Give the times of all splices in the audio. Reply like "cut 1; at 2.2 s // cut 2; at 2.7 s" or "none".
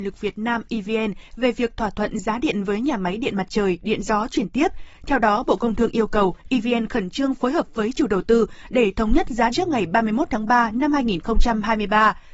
cut 1; at 9.5 s